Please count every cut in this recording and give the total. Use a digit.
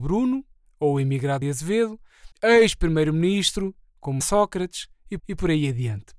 4